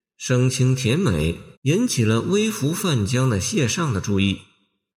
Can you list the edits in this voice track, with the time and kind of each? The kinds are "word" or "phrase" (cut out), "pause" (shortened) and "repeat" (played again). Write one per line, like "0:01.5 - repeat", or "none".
0:01.5 - pause